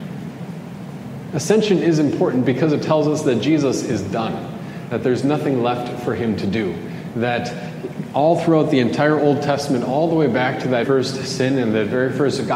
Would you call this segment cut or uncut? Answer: cut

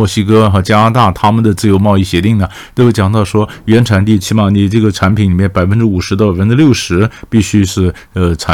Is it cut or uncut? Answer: uncut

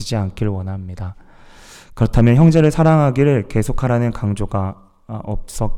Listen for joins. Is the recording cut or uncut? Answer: uncut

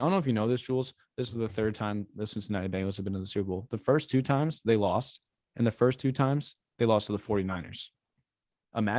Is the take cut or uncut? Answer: uncut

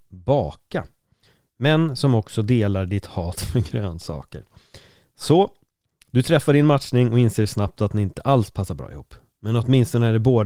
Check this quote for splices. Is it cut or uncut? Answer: uncut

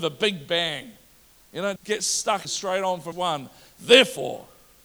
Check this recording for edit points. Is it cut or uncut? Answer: cut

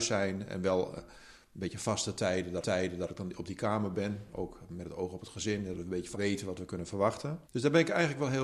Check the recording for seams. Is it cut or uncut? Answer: cut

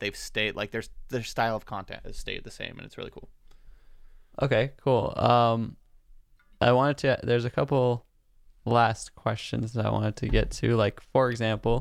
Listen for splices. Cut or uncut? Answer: uncut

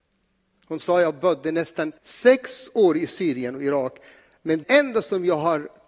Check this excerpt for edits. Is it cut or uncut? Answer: cut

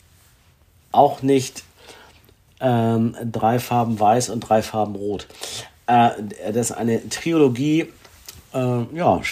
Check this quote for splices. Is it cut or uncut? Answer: uncut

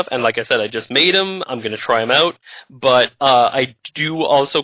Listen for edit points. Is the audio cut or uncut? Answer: uncut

